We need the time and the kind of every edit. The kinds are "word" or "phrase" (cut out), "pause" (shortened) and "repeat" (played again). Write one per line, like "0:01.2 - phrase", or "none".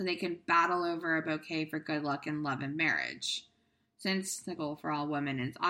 none

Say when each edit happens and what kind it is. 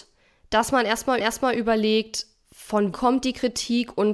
0:01.2 - repeat
0:02.9 - word

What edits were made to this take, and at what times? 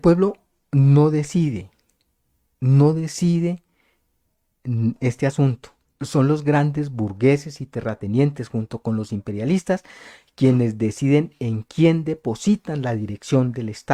none

